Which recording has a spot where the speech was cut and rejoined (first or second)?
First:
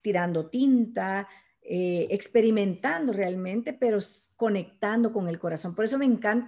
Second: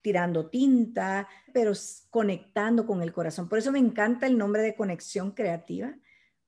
second